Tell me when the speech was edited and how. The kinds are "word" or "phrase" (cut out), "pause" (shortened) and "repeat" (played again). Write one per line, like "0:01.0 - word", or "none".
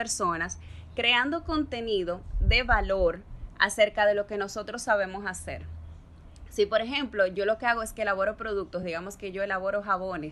none